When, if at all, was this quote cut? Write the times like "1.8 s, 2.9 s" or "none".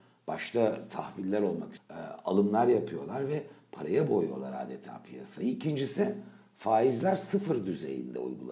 1.8 s